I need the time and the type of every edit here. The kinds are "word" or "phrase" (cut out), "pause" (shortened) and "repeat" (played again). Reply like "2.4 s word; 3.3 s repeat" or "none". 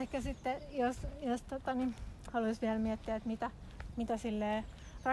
none

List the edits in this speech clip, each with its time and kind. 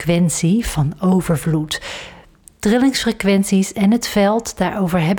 none

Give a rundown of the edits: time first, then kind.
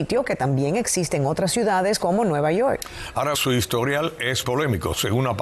3.3 s word; 4.4 s word

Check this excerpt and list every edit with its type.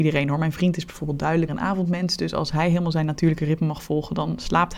1.5 s word

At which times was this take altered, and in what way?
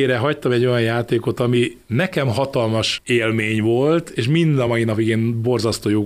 none

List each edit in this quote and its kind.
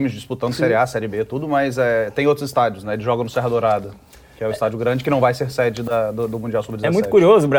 none

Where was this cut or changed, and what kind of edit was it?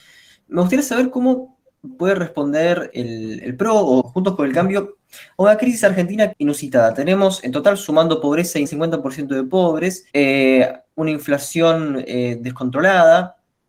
2.9 s word; 4.0 s word; 6.3 s phrase; 8.6 s word; 10.1 s pause

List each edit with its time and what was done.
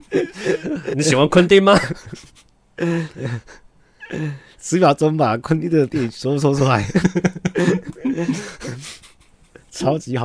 0.9 s word

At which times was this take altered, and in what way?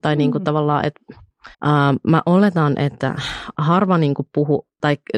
1.5 s pause

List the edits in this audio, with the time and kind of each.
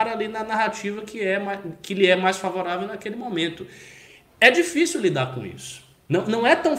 none

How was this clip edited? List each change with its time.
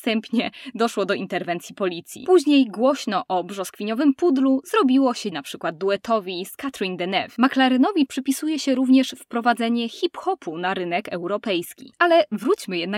5.3 s word; 8.1 s word

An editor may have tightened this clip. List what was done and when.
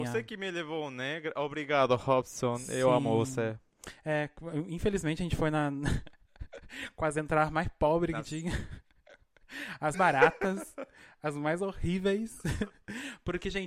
9.9 s word

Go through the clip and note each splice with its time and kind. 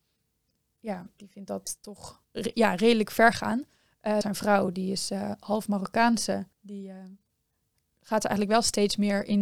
2.2 s pause; 4.2 s word; 6.5 s pause

